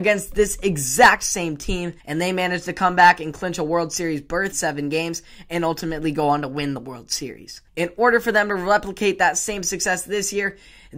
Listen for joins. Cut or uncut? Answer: cut